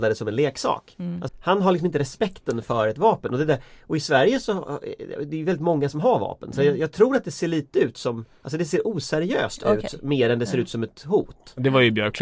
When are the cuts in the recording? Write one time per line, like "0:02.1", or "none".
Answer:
0:01.3